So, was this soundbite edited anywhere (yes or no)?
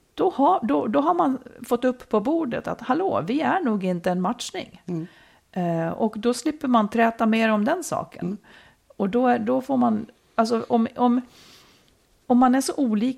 no